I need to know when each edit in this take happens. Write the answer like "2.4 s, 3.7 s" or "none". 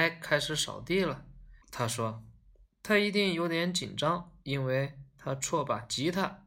1.6 s, 4.4 s